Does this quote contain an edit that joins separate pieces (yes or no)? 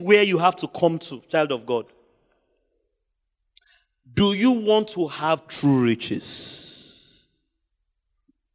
no